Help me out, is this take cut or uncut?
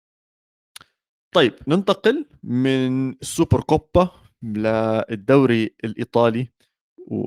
uncut